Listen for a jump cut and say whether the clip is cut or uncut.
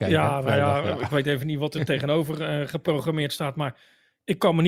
uncut